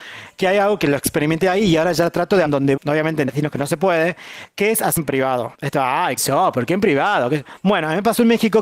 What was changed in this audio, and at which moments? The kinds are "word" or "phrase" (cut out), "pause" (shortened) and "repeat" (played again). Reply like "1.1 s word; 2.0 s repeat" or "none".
2.4 s word; 2.8 s word; 3.3 s phrase; 5.0 s word; 5.5 s pause; 6.2 s word